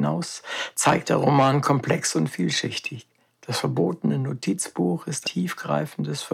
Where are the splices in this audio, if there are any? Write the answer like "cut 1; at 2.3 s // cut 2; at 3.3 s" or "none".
cut 1; at 1.0 s // cut 2; at 3.3 s // cut 3; at 5.2 s